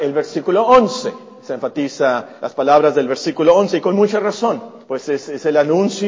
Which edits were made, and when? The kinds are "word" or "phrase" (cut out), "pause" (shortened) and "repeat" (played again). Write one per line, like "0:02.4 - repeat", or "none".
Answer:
0:02.4 - pause
0:04.8 - pause